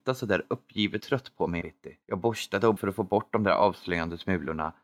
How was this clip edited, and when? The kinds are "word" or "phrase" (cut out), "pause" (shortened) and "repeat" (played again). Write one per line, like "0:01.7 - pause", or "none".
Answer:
0:01.0 - word
0:01.6 - word
0:02.0 - pause
0:02.8 - word